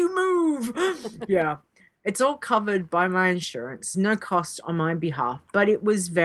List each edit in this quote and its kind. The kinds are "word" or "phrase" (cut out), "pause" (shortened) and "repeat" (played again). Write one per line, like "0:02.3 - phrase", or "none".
0:03.9 - word